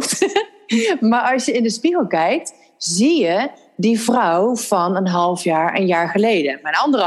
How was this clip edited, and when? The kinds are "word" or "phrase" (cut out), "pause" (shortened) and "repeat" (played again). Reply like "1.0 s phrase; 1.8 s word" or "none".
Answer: none